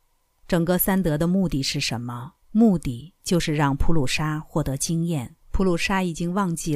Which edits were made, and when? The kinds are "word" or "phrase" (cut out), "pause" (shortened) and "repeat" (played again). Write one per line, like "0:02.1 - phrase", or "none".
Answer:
0:02.4 - pause
0:05.4 - pause